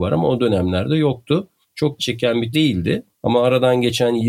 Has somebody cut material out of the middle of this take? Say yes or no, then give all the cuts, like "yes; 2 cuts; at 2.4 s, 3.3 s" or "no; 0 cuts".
yes; 3 cuts; at 2.0 s, 2.5 s, 3.1 s